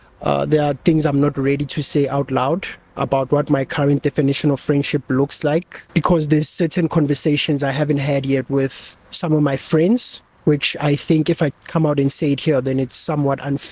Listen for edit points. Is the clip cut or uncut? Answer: cut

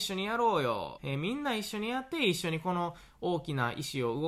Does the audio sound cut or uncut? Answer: cut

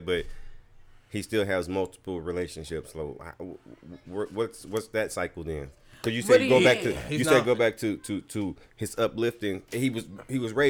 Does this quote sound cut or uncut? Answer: uncut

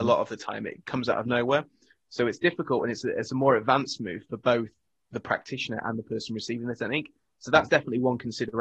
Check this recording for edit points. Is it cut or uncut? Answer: uncut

